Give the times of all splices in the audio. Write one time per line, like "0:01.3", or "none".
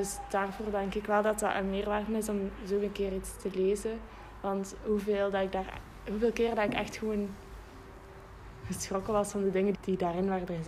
0:09.7